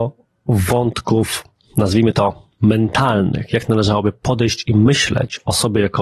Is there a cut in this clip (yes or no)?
no